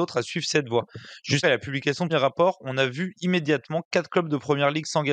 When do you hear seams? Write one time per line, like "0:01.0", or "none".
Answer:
0:01.4
0:02.1